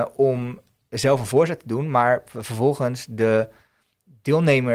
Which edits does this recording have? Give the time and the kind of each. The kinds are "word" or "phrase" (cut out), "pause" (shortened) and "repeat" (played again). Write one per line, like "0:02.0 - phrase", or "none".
none